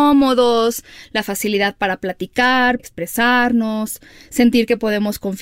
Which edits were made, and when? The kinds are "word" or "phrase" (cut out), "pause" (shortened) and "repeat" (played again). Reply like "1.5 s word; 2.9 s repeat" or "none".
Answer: 2.8 s word